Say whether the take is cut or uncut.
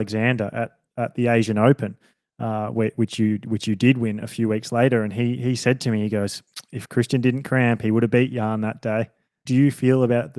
uncut